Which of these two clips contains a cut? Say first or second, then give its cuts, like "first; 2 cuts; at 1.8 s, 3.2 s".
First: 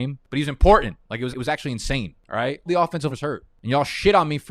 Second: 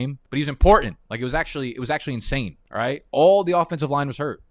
first; 3 cuts; at 1.3 s, 2.7 s, 3.1 s